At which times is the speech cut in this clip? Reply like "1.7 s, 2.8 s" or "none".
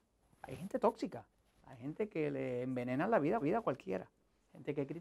3.4 s